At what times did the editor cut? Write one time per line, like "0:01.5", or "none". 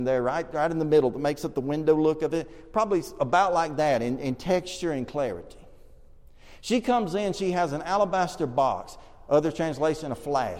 none